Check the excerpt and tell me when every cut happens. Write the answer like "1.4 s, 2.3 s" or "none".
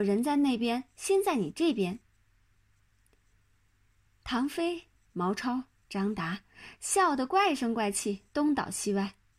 none